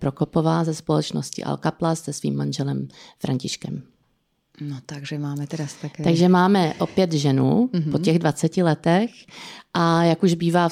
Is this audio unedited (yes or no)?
yes